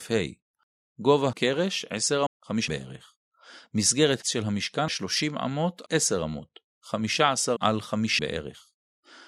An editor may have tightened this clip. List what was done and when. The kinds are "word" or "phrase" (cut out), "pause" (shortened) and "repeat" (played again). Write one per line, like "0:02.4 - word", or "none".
0:01.3 - word
0:02.3 - word
0:02.7 - word
0:04.2 - word
0:04.9 - word
0:05.9 - word
0:07.6 - word
0:08.2 - word